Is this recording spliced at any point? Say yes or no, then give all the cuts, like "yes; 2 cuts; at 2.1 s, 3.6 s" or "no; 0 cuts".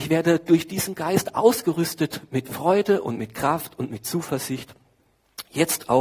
no; 0 cuts